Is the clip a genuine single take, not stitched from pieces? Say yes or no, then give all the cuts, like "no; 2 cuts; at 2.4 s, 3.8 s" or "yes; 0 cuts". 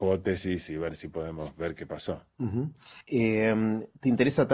no; 1 cut; at 3.0 s